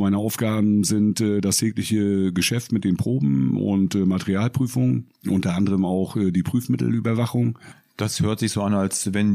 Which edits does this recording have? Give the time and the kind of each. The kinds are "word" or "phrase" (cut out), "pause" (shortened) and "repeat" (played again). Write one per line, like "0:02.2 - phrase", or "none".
none